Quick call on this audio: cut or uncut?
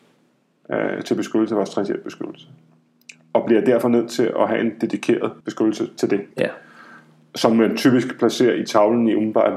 cut